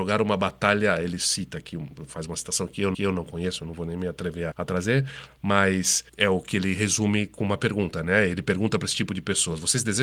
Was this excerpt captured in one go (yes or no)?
no